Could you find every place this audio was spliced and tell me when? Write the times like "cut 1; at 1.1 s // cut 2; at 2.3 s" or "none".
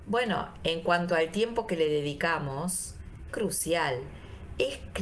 cut 1; at 3.3 s